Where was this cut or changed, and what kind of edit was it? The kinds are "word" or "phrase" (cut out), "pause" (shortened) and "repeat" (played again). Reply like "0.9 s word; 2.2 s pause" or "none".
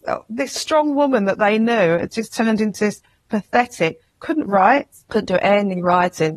none

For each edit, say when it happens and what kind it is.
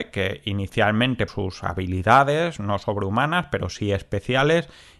1.3 s word

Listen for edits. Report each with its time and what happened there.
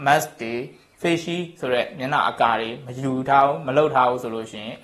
none

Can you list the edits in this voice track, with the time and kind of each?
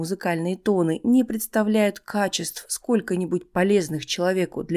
none

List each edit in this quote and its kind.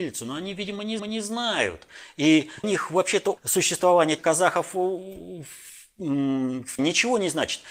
1.0 s repeat; 2.6 s word; 3.4 s word; 4.2 s phrase; 6.8 s word

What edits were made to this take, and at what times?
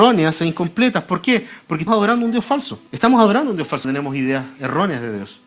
1.9 s word; 2.9 s pause; 3.8 s word

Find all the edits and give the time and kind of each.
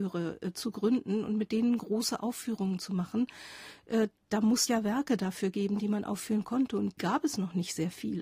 4.7 s word; 7.0 s word

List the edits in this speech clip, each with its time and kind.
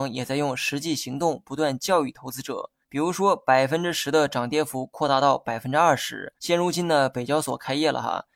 2.8 s pause; 6.4 s pause

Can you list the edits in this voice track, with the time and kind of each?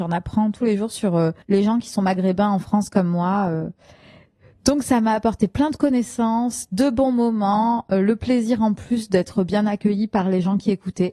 1.4 s pause

